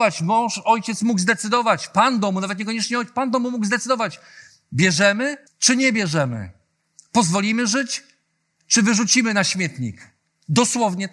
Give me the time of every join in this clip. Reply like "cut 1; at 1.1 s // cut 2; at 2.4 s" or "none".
cut 1; at 5.5 s